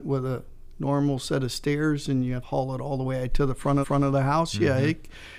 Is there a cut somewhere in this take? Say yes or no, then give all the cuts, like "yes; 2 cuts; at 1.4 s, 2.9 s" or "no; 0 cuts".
yes; 2 cuts; at 2.4 s, 3.8 s